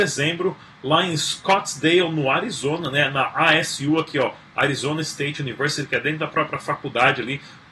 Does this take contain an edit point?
no; 0 cuts

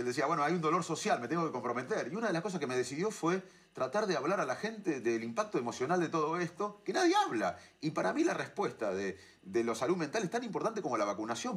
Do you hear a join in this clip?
no; 0 cuts

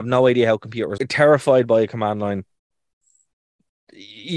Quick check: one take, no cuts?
no; 1 cut; at 1.0 s

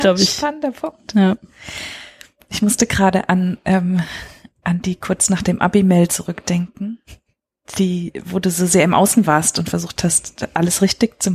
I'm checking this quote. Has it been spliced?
no; 0 cuts

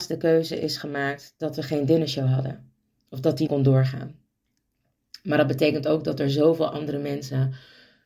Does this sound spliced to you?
yes; 1 cut; at 3.5 s

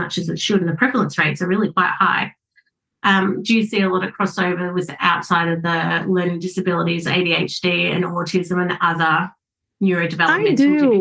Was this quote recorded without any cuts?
yes; 0 cuts

